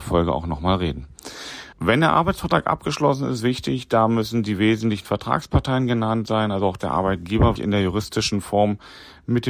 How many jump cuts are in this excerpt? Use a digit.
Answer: 3